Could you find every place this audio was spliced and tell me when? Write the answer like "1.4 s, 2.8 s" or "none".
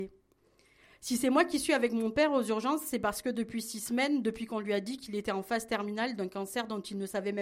none

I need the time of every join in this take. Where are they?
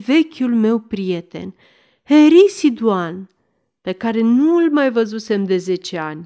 none

